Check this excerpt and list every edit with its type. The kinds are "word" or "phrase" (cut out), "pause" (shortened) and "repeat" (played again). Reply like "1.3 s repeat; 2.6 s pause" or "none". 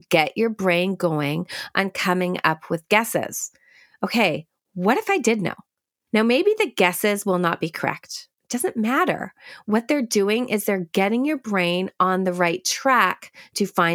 8.3 s pause